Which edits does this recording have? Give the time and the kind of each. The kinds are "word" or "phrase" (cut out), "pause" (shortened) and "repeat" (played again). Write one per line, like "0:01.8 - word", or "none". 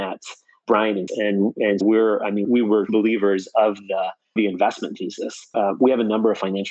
0:01.1 - word
0:01.8 - word
0:02.4 - word
0:02.9 - word
0:04.4 - word
0:05.5 - word